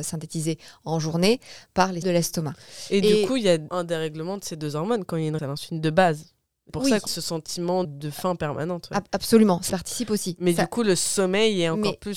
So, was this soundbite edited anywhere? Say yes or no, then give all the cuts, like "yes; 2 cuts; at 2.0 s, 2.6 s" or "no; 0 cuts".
yes; 7 cuts; at 2.0 s, 3.7 s, 5.4 s, 6.7 s, 7.1 s, 7.8 s, 9.7 s